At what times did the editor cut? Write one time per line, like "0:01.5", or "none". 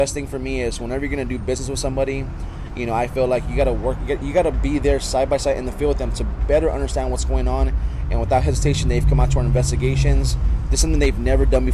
none

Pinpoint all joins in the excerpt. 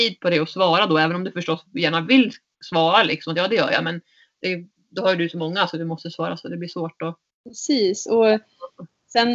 none

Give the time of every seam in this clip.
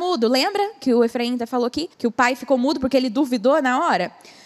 0:01.9

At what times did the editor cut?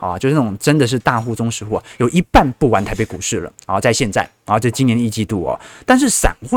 0:03.5

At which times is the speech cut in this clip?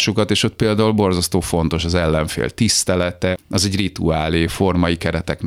none

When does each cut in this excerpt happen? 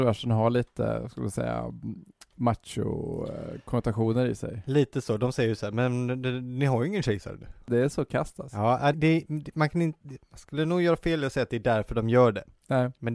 0:08.9

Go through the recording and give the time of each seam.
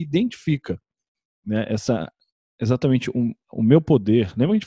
none

